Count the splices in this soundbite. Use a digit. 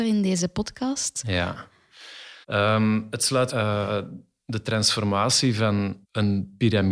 3